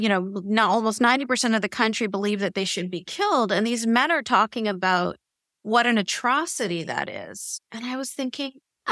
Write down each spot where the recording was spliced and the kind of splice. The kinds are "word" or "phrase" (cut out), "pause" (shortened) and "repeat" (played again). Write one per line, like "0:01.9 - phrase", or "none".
none